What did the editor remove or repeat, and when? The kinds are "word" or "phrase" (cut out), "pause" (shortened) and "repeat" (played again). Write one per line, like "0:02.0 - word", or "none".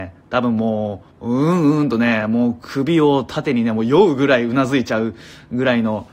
0:01.1 - pause